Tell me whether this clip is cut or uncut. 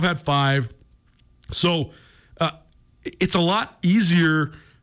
uncut